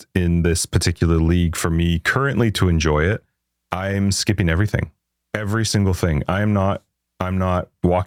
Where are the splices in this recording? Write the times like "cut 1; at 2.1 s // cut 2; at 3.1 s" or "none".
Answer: none